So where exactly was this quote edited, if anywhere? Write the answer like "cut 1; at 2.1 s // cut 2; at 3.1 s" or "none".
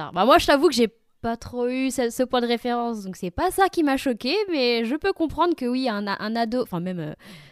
none